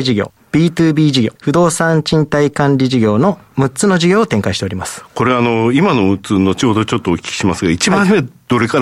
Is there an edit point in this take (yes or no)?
yes